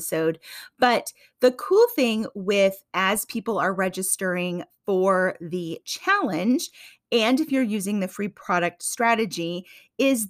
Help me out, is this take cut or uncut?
uncut